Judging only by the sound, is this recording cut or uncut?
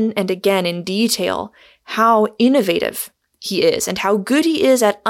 uncut